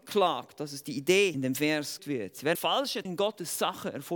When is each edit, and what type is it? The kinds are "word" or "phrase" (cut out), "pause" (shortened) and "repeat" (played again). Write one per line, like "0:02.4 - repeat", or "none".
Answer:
0:01.3 - phrase
0:02.0 - word
0:02.5 - word
0:03.0 - word